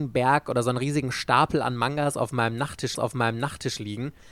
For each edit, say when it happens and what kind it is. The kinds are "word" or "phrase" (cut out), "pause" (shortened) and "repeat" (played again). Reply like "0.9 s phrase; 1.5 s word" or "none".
3.0 s repeat